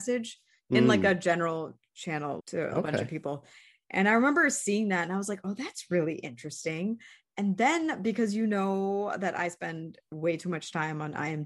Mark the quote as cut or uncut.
uncut